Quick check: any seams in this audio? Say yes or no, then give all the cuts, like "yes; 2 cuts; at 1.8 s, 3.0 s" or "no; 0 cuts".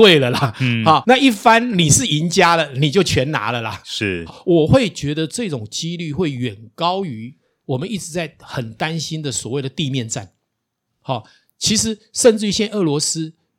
yes; 2 cuts; at 1.0 s, 4.3 s